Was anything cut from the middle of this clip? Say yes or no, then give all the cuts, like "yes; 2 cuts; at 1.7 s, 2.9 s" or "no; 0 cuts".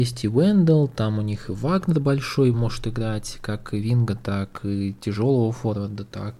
yes; 1 cut; at 2.5 s